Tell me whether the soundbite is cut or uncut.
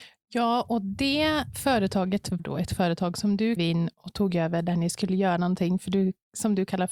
cut